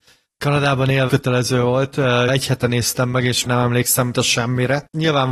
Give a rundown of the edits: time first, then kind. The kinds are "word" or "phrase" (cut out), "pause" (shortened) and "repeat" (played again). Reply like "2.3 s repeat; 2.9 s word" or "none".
1.1 s word; 2.3 s word; 3.5 s word; 4.1 s word